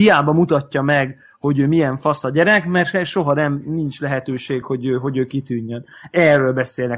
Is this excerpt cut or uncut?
uncut